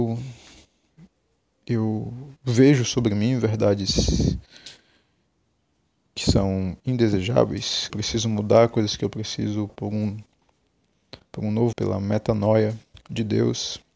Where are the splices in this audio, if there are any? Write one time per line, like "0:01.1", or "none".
0:02.4
0:07.9
0:09.7
0:11.2
0:11.7